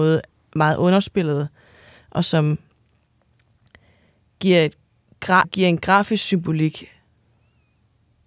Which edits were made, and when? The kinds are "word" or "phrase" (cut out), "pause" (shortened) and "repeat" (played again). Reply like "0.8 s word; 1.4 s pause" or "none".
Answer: 5.4 s word

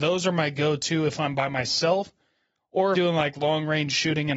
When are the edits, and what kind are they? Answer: 2.9 s phrase

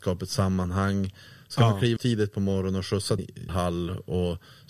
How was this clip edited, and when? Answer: 2.0 s word; 3.2 s word; 3.5 s word

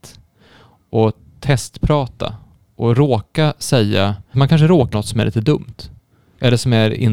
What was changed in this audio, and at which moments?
4.3 s word; 4.9 s word

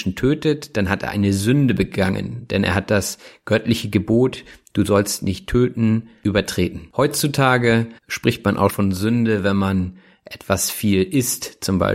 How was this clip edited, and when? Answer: 8.0 s pause; 8.7 s word

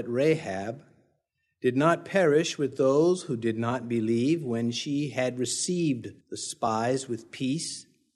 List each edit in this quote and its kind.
6.2 s pause

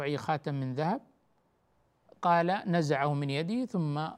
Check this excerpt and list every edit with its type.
none

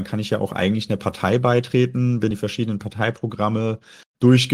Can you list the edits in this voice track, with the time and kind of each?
2.3 s word

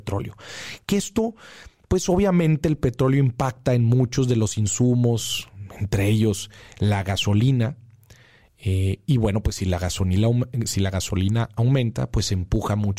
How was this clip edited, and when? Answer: none

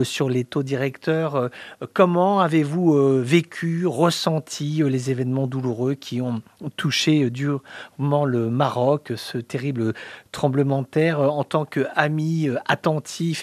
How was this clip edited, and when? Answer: none

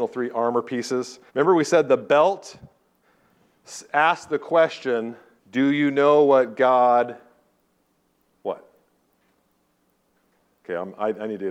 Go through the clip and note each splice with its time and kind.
1.3 s pause; 5.4 s pause

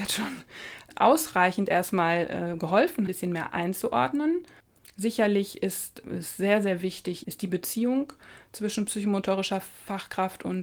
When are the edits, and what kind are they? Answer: 3.1 s phrase; 7.2 s word

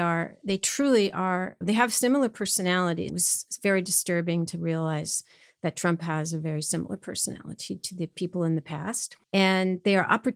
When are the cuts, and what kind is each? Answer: 1.6 s word; 3.1 s word; 9.2 s pause

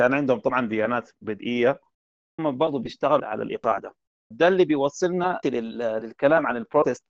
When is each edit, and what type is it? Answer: 2.4 s word; 3.2 s word; 4.3 s word; 5.4 s word

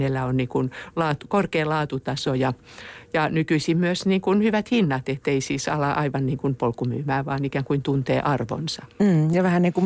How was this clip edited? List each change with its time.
none

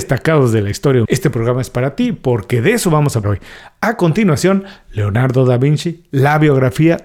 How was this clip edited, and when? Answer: 1.1 s word; 3.2 s word

